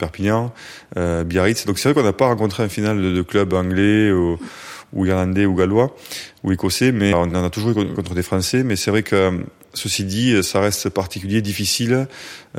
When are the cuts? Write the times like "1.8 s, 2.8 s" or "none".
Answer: 7.1 s, 7.9 s